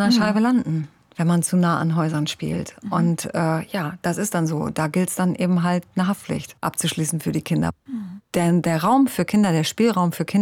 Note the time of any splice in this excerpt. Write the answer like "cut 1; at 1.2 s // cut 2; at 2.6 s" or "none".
none